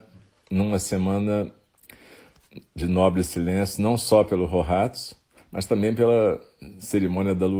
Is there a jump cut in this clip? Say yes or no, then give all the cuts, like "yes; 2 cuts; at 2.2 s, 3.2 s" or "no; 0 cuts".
no; 0 cuts